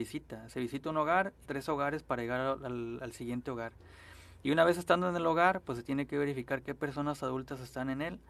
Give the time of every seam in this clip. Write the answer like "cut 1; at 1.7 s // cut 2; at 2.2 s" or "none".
cut 1; at 1.4 s